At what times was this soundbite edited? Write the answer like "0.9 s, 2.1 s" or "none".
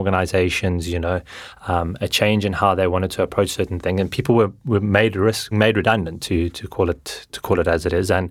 5.5 s